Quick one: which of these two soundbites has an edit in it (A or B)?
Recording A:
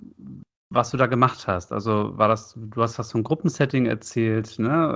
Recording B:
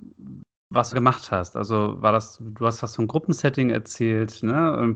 B